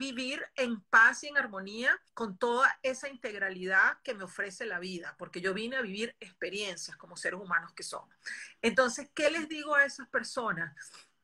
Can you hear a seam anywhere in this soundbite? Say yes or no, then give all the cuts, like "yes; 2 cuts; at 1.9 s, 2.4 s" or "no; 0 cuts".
yes; 1 cut; at 2.1 s